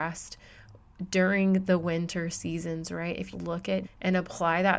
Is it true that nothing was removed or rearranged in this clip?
no; 2 cuts; at 3.3 s, 3.8 s

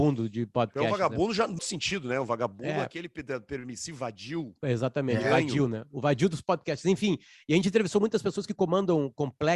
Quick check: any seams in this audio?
yes; 1 cut; at 1.6 s

